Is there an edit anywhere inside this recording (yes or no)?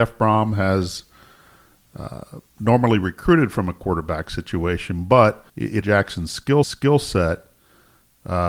yes